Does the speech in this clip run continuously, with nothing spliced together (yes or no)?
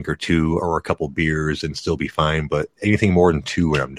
yes